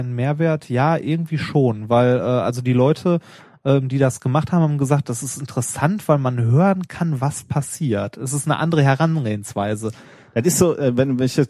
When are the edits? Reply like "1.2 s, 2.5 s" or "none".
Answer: none